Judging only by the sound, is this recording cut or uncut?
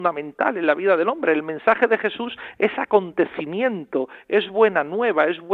uncut